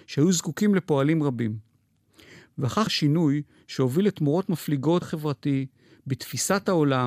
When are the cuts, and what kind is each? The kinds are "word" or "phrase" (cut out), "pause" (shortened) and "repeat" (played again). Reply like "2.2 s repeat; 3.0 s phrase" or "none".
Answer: 2.9 s word; 5.0 s word